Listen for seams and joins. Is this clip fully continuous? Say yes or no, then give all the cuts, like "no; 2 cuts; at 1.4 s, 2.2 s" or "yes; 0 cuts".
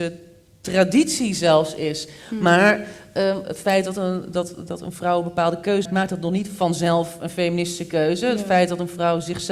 no; 1 cut; at 5.9 s